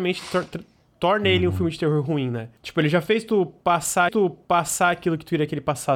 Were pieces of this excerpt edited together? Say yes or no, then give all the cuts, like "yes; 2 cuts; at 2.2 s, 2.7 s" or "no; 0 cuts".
yes; 2 cuts; at 2.6 s, 4.1 s